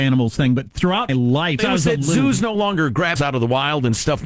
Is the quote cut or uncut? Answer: cut